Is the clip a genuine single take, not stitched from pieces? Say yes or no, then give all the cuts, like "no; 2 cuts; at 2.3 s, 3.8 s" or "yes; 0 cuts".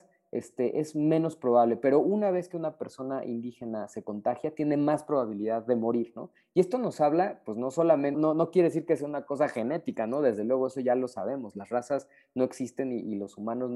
no; 1 cut; at 8.1 s